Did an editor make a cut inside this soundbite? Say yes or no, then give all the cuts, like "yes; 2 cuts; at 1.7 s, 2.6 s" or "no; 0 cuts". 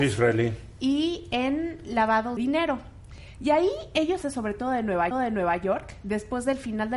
yes; 3 cuts; at 2.4 s, 4.2 s, 5.1 s